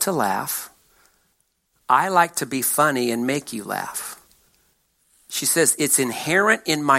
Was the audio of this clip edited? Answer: no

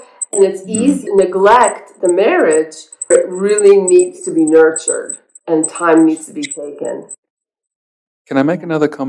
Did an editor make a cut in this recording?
yes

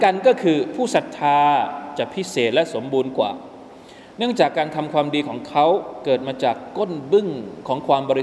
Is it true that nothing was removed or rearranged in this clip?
yes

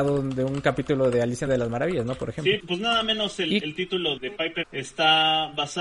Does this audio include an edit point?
yes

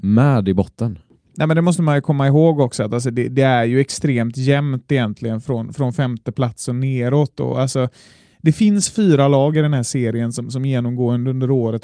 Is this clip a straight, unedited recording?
yes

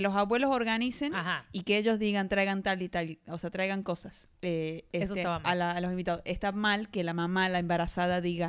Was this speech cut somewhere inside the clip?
yes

